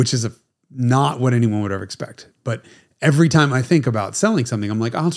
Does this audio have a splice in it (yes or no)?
no